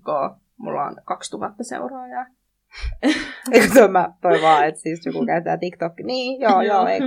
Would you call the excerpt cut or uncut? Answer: uncut